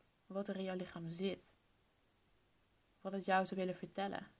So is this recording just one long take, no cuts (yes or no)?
no